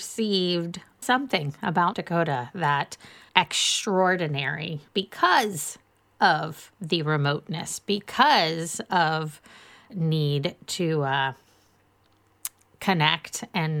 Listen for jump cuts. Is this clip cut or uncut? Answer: cut